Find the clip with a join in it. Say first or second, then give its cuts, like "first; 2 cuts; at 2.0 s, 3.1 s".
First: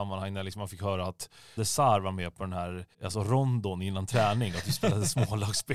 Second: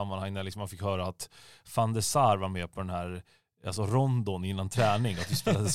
first; 2 cuts; at 1.6 s, 2.9 s